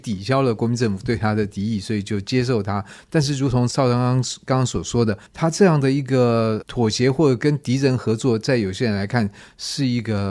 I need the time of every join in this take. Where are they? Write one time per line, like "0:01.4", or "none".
0:05.3